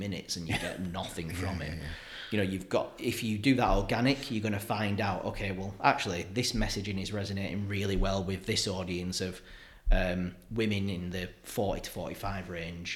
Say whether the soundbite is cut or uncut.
uncut